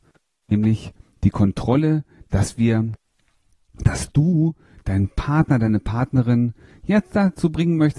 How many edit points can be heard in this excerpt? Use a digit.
0